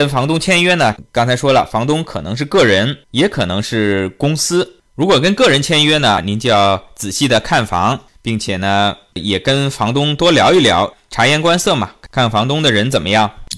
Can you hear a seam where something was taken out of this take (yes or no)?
yes